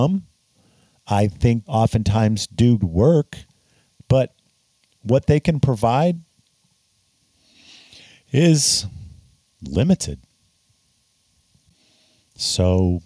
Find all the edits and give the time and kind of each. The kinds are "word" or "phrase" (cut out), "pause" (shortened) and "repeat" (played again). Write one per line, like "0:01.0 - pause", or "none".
0:01.7 - word
0:02.8 - word